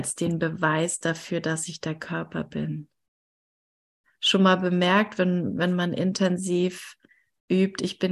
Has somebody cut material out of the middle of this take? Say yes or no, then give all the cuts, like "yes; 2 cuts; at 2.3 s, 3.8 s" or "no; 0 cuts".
no; 0 cuts